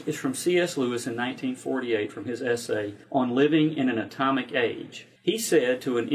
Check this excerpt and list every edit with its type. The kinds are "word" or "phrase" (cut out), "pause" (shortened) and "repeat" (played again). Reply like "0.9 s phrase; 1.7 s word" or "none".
3.0 s pause; 5.2 s pause